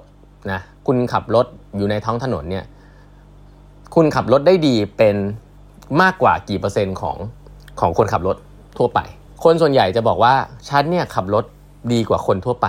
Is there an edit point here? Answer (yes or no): yes